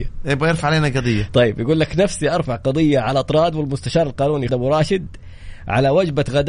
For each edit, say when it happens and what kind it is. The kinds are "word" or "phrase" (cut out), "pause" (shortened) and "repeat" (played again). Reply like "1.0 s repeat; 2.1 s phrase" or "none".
4.5 s word